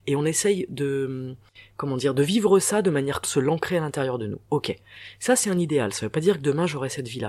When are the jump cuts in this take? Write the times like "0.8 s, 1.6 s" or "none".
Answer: 3.2 s, 4.5 s